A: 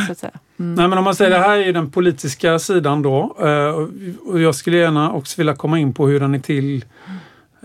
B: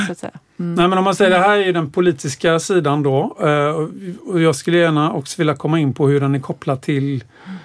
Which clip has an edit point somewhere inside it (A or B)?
A